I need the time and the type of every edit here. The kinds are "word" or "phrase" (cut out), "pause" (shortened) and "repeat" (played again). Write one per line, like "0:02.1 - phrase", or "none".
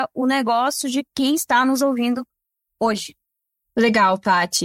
none